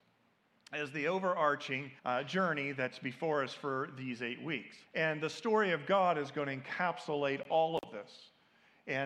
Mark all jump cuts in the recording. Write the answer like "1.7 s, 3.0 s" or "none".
2.0 s, 4.9 s